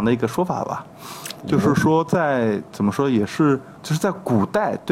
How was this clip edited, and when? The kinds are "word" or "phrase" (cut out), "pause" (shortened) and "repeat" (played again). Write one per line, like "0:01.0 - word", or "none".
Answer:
0:03.8 - pause